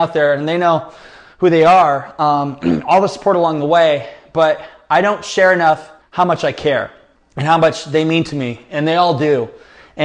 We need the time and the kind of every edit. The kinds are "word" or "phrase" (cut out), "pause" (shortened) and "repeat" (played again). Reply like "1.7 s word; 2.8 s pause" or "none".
6.0 s pause; 7.1 s pause